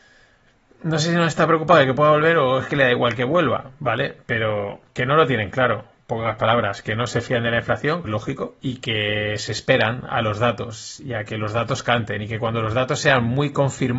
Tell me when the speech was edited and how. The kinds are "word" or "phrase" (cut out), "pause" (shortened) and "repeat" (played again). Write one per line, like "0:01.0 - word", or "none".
0:08.0 - word
0:08.6 - pause